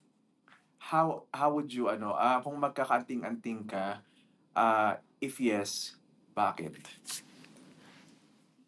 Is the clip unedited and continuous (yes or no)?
yes